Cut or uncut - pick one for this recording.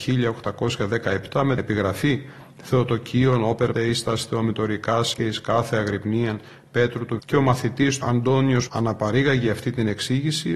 cut